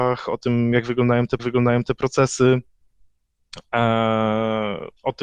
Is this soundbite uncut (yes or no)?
no